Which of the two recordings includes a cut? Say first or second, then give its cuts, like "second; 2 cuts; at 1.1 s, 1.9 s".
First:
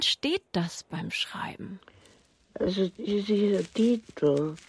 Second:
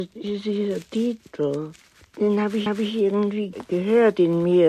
second; 1 cut; at 2.7 s